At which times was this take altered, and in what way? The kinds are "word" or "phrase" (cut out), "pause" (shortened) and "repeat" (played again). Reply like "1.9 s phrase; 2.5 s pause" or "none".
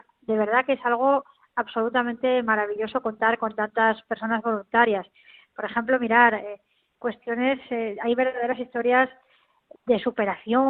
none